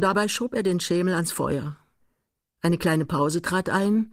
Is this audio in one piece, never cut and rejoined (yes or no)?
yes